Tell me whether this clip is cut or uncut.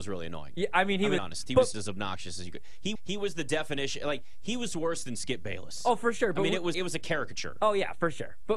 cut